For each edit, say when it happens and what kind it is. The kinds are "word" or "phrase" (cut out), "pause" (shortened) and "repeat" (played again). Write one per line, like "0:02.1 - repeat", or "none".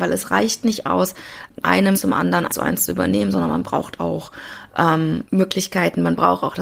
0:01.6 - phrase
0:01.9 - word
0:02.5 - word
0:04.0 - word
0:05.2 - word